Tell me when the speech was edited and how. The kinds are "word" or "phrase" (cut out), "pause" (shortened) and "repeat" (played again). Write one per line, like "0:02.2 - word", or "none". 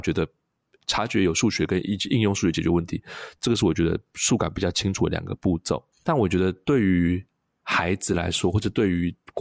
none